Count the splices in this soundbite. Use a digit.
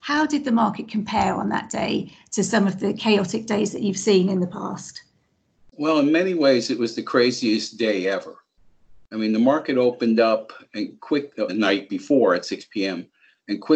1